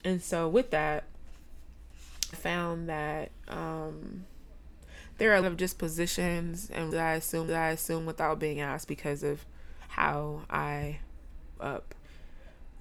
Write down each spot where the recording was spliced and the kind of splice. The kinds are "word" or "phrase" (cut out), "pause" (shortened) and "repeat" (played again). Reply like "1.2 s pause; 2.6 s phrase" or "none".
2.3 s word; 5.4 s word; 6.9 s word; 7.5 s repeat; 11.6 s word